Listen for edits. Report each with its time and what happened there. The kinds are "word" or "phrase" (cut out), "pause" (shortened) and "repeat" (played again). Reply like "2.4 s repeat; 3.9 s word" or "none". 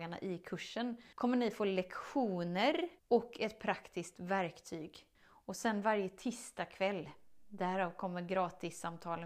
1.1 s pause; 3.0 s pause; 5.1 s pause